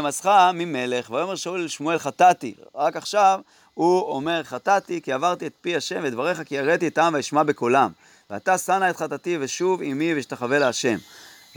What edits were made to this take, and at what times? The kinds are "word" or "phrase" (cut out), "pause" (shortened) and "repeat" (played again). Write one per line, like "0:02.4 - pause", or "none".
none